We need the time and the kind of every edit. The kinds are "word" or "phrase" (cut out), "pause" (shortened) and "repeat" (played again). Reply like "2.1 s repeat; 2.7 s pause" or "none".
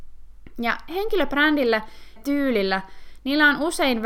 2.2 s word